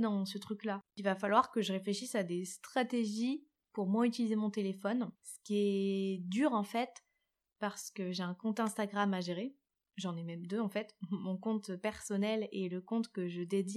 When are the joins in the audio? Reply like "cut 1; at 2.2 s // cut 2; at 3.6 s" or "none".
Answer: cut 1; at 5.1 s